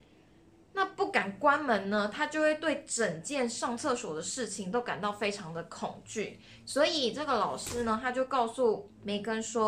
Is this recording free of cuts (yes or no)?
yes